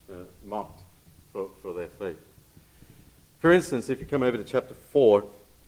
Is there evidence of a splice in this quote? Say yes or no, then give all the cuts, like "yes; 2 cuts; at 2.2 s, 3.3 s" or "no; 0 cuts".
no; 0 cuts